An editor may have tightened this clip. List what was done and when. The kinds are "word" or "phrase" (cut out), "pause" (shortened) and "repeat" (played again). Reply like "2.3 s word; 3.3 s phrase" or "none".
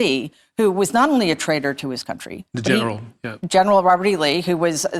none